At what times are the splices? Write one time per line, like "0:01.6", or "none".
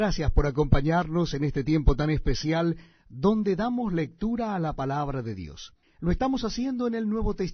0:05.8